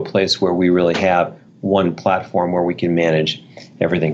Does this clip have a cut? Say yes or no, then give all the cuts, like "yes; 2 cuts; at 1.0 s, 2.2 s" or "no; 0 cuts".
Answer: no; 0 cuts